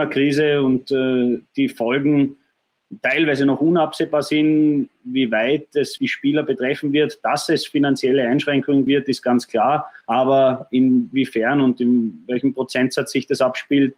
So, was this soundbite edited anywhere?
yes; 3 cuts; at 6.0 s, 8.9 s, 10.0 s

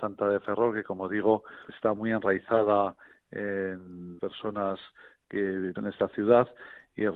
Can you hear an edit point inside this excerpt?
yes; 3 cuts; at 1.7 s, 4.2 s, 5.7 s

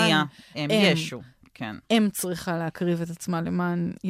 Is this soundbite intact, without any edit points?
yes; 0 cuts

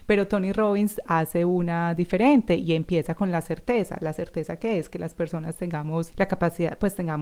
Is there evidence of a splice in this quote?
yes; 1 cut; at 6.1 s

